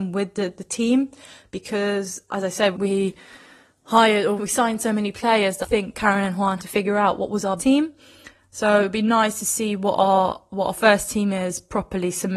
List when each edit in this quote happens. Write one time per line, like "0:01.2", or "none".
0:02.7
0:04.4
0:05.6
0:05.9
0:06.6
0:07.6